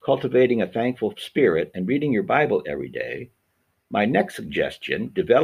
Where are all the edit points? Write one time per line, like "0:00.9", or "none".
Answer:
none